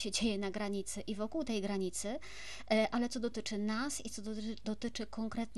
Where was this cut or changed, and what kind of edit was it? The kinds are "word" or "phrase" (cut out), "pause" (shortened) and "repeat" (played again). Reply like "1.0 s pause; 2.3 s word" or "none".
none